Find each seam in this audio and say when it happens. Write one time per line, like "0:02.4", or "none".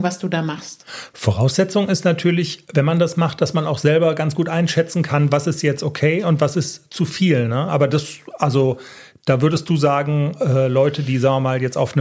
none